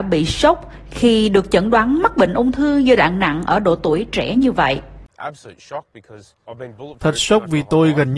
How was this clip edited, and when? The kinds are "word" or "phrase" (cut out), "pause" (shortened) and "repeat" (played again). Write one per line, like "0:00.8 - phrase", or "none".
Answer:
none

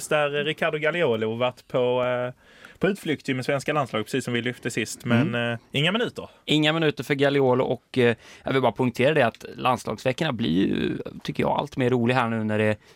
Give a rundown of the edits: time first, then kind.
0:05.7 - pause

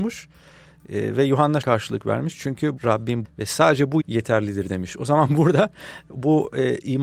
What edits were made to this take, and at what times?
0:01.6 - word
0:02.8 - word
0:03.2 - word
0:04.0 - word

